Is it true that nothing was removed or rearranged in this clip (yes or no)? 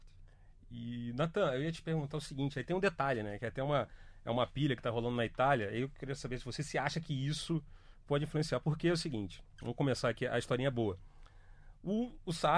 yes